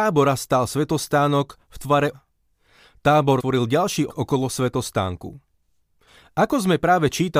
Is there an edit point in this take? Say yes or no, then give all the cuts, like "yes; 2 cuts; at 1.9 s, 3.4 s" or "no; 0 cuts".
yes; 3 cuts; at 2.1 s, 3.4 s, 4.1 s